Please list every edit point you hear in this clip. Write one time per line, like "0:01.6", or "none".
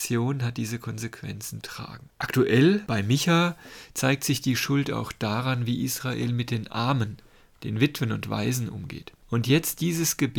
0:01.6
0:09.2